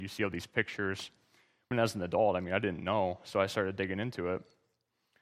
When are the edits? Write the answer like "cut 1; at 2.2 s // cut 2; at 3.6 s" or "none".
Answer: cut 1; at 1.7 s